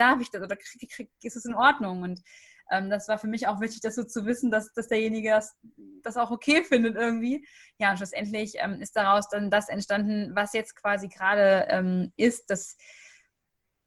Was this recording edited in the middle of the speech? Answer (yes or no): no